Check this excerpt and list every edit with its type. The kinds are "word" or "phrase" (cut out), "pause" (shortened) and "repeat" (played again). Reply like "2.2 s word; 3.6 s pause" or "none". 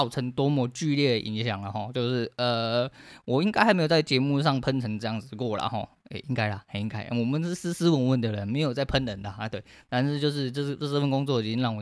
none

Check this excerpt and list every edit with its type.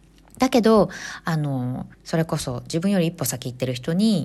1.9 s pause

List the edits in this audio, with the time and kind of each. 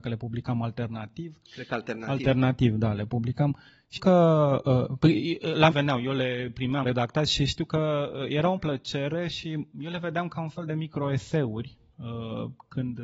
4.0 s word; 5.7 s word; 6.8 s word; 8.6 s word; 9.7 s word

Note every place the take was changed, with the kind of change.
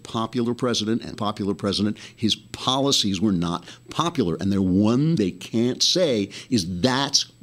1.1 s phrase; 5.2 s word

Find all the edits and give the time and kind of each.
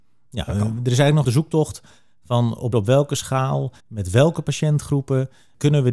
1.2 s phrase; 2.7 s phrase; 3.8 s pause

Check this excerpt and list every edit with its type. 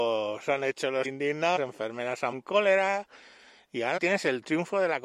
1.0 s word; 1.6 s word; 2.3 s word; 4.0 s word

